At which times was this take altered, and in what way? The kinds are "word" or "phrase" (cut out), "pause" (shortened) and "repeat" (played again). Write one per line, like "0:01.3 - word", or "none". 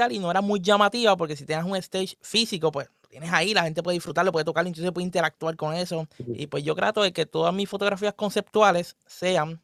0:06.1 - pause